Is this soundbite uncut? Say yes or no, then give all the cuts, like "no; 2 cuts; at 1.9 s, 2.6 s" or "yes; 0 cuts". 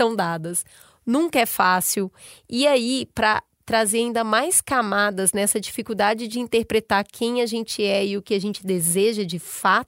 yes; 0 cuts